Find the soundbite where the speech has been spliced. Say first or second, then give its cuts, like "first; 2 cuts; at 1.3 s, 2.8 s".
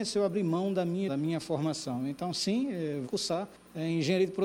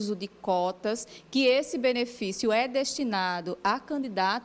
first; 2 cuts; at 1.1 s, 3.0 s